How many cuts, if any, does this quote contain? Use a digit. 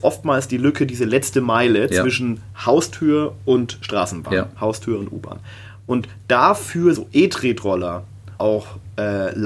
2